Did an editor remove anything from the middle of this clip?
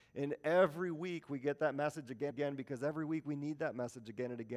yes; 1 cut; at 2.3 s

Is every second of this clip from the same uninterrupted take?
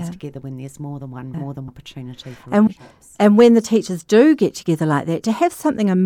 no; 3 cuts; at 1.3 s, 1.7 s, 2.7 s

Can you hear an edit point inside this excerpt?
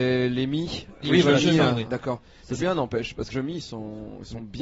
yes; 4 cuts; at 1.0 s, 1.9 s, 2.6 s, 3.3 s

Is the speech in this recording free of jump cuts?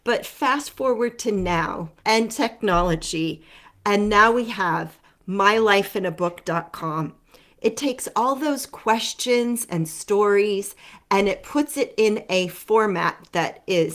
no; 1 cut; at 2.0 s

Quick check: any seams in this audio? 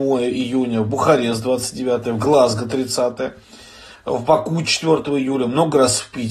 no; 0 cuts

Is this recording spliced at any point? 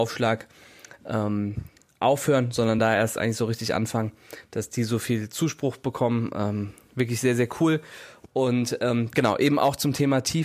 no; 0 cuts

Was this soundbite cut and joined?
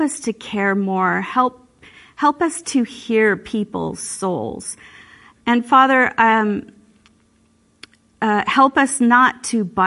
no; 0 cuts

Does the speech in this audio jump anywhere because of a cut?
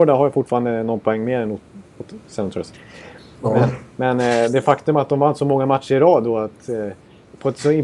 no; 0 cuts

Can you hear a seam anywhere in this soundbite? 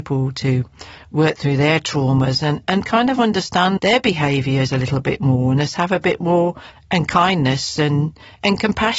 yes; 3 cuts; at 2.6 s, 3.8 s, 6.7 s

